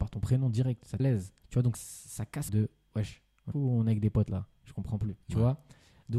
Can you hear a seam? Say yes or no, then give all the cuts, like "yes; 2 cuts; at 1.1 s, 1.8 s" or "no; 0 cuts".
yes; 6 cuts; at 1.0 s, 1.4 s, 1.7 s, 2.5 s, 3.5 s, 5.2 s